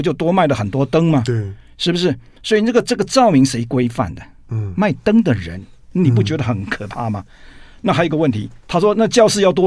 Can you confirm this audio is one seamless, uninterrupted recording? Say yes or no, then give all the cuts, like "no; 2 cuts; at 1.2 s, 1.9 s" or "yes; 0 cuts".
no; 1 cut; at 8.6 s